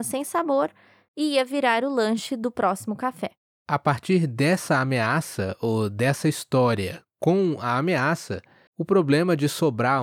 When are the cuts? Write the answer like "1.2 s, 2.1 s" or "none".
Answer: none

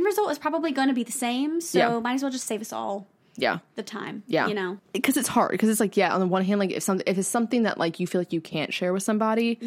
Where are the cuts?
none

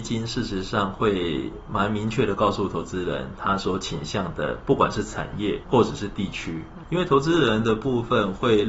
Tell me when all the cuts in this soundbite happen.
5.6 s, 6.8 s

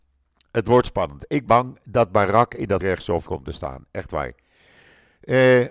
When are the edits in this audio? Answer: 1.5 s, 2.8 s, 3.2 s

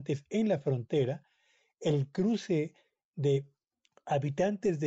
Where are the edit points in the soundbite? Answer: none

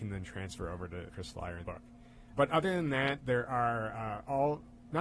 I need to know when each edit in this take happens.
1.1 s, 1.6 s

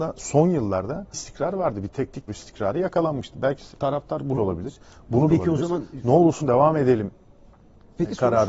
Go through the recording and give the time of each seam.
1.1 s, 2.3 s, 3.7 s, 4.3 s, 5.3 s, 6.4 s

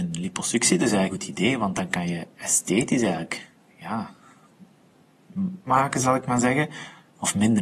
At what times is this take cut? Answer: 1.1 s, 5.7 s

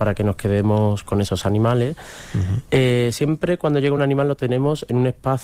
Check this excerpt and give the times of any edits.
none

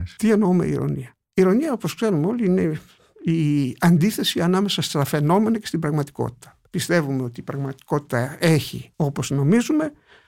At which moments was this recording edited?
6.7 s, 8.9 s

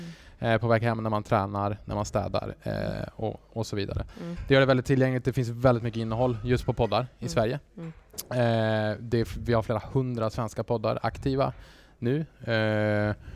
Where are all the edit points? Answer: 7.7 s

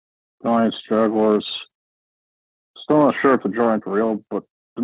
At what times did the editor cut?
3.8 s

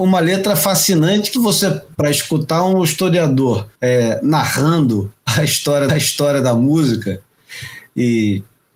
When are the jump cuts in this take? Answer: 1.3 s, 1.9 s, 3.7 s, 5.9 s

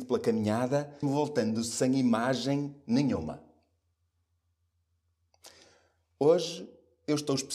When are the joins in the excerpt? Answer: 1.0 s

